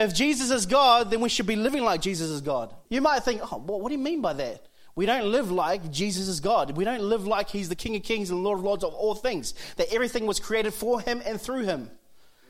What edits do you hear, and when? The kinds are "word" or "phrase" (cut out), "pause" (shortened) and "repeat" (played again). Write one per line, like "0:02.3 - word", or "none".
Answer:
0:02.8 - pause